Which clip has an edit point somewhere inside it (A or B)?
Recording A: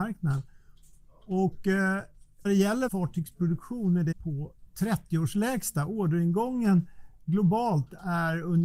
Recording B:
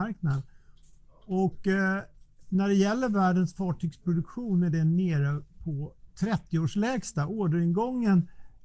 A